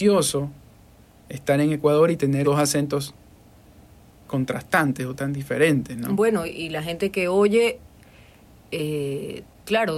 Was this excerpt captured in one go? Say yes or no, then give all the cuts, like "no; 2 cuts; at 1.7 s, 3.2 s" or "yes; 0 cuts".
no; 3 cuts; at 2.4 s, 4.2 s, 5.2 s